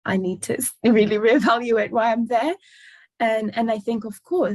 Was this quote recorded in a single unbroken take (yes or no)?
yes